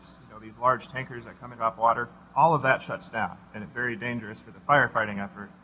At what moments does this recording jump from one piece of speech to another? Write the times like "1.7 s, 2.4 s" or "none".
1.5 s, 3.7 s